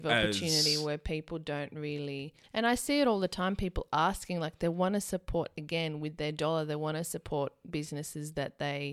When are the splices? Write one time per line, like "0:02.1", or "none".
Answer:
0:02.4